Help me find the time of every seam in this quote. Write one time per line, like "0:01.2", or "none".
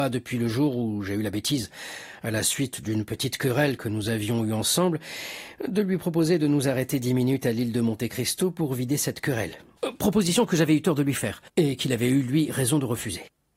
none